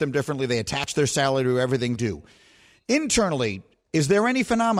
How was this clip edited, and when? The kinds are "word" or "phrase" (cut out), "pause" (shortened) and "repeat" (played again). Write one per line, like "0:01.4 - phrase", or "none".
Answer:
0:02.0 - word